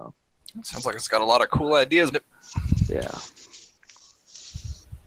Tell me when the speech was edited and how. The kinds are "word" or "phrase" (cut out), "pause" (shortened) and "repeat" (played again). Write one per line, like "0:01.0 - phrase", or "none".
0:02.1 - word